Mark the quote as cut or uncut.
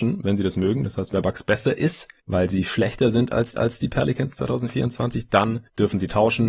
cut